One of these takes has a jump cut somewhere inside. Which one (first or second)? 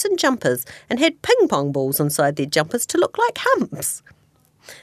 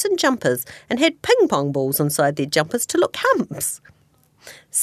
second